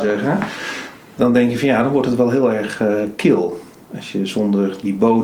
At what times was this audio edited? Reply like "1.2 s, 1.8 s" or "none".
none